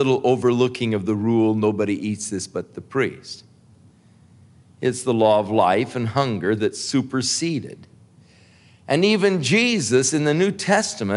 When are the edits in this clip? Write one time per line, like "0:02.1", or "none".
none